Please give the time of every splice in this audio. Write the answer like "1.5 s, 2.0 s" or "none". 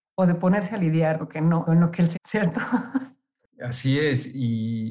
1.2 s, 1.6 s, 2.1 s